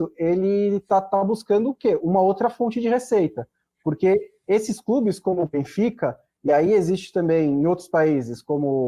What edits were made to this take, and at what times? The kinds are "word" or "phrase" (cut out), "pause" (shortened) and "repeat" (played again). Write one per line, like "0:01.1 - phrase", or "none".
none